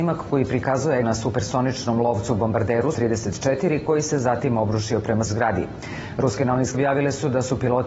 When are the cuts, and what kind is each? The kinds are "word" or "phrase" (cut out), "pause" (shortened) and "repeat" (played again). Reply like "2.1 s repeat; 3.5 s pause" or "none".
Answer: 1.0 s word; 2.9 s word; 5.3 s word; 6.7 s word